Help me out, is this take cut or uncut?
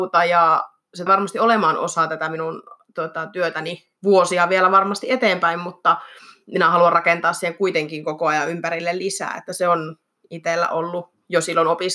cut